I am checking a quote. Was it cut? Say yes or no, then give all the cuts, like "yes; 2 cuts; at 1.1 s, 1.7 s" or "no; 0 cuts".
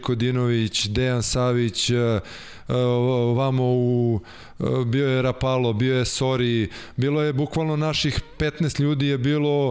no; 0 cuts